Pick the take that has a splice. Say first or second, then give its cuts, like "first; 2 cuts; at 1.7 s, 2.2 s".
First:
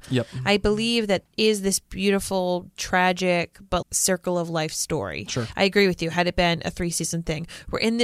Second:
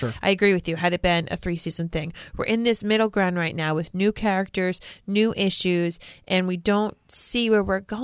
first; 2 cuts; at 1.2 s, 3.8 s